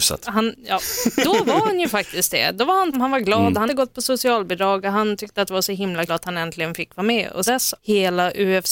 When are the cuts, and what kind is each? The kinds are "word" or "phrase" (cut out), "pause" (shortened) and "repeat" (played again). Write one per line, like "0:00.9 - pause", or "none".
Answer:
0:02.9 - word
0:03.7 - word
0:06.1 - word
0:07.5 - word
0:07.8 - word